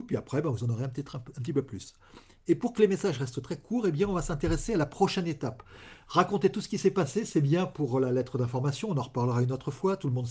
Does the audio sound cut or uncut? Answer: uncut